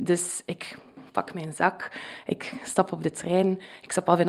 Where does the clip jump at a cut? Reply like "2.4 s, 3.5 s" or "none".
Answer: none